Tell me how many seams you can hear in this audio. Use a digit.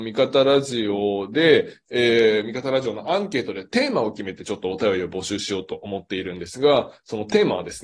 0